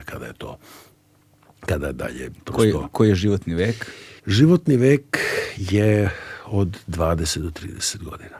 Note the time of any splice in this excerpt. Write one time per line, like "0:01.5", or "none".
0:04.2